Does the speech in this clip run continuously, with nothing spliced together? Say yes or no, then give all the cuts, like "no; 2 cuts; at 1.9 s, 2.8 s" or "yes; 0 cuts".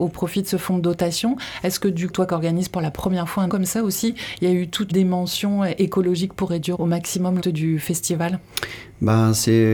no; 5 cuts; at 2.1 s, 3.5 s, 4.9 s, 6.7 s, 7.4 s